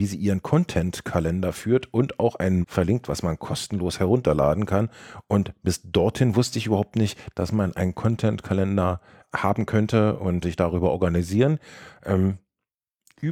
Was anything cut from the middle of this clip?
yes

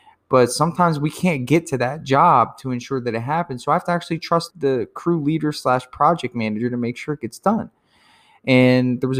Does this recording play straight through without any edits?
no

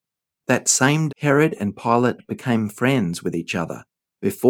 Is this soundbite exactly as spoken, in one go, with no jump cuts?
no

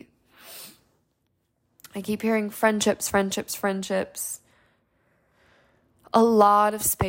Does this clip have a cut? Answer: no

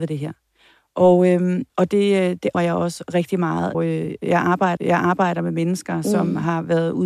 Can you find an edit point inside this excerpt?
yes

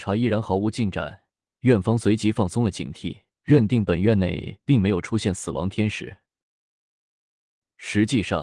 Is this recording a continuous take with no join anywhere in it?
no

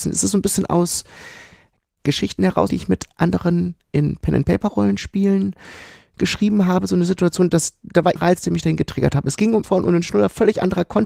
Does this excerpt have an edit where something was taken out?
yes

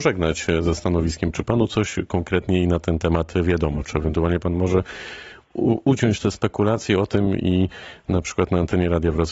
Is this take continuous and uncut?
yes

